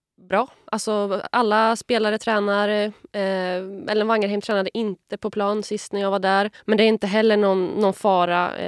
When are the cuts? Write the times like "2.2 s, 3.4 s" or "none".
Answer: 6.6 s